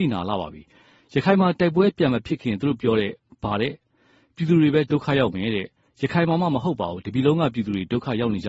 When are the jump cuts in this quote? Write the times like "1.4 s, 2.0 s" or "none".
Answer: none